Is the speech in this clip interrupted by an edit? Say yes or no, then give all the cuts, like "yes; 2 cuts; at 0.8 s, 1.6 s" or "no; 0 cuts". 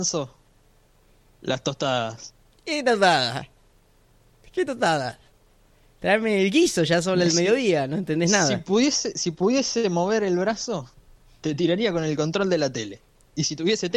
no; 0 cuts